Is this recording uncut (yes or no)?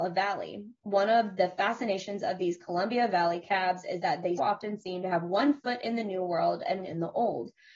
no